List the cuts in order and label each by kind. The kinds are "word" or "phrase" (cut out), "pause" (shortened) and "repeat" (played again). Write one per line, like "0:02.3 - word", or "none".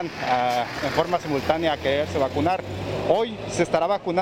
none